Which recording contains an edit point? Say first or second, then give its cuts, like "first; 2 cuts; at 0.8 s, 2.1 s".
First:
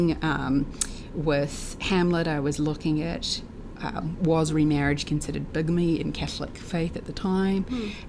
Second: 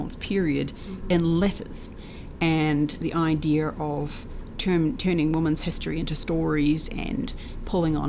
second; 1 cut; at 3.0 s